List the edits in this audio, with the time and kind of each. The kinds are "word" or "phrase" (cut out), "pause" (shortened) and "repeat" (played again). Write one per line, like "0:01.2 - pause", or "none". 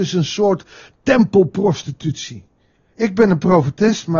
none